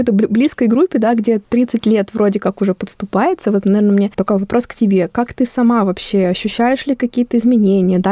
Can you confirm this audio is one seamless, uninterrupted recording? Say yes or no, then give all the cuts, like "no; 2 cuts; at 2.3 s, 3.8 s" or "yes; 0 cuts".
yes; 0 cuts